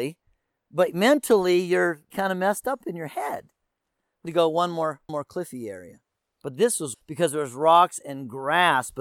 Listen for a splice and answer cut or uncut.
cut